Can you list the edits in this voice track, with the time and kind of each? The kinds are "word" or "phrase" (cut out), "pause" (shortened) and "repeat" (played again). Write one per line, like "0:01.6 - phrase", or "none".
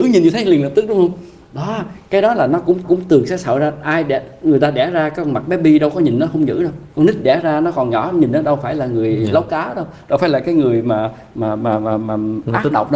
0:02.8 - repeat
0:06.9 - pause